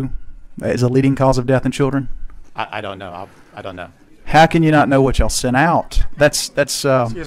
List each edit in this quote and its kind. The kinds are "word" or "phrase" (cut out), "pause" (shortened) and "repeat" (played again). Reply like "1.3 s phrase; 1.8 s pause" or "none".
none